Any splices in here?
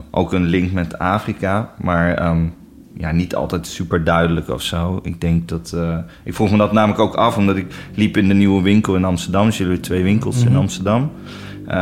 no; 0 cuts

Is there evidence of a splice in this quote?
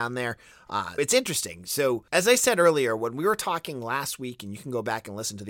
yes; 2 cuts; at 1.0 s, 2.1 s

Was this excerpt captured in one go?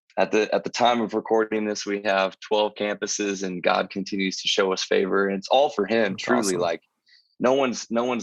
yes; 0 cuts

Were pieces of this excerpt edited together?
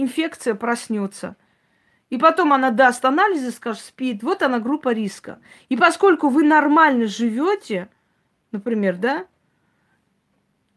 no; 0 cuts

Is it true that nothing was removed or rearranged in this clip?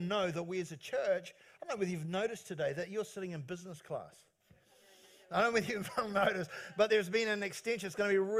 yes; 0 cuts

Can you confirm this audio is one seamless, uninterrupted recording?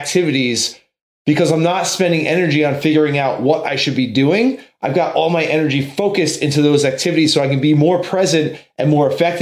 yes; 0 cuts

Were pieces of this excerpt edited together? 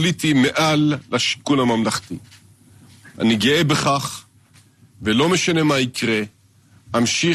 no; 0 cuts

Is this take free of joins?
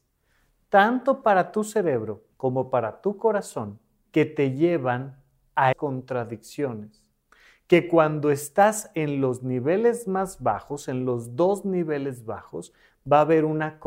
no; 3 cuts; at 2.3 s, 4.1 s, 5.7 s

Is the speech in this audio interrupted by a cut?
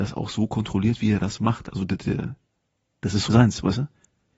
yes; 1 cut; at 3.3 s

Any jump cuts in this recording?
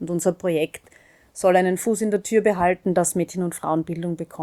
no; 0 cuts

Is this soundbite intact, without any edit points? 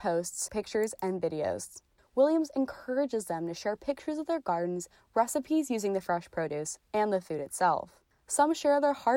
yes; 0 cuts

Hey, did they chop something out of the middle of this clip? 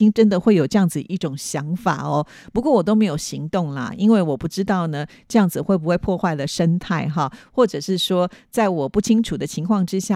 no; 0 cuts

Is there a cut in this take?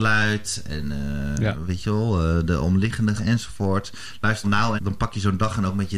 yes; 3 cuts; at 3.2 s, 4.4 s, 4.8 s

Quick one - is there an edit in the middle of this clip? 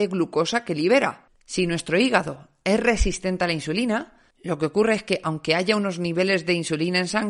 yes; 2 cuts; at 1.3 s, 4.3 s

